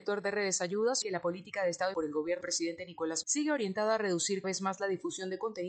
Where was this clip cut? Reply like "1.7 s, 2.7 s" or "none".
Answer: 1.0 s, 1.9 s, 2.4 s, 3.2 s, 4.4 s